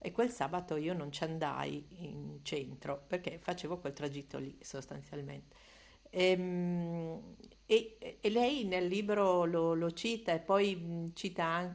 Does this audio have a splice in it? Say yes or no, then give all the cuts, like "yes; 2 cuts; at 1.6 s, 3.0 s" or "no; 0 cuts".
no; 0 cuts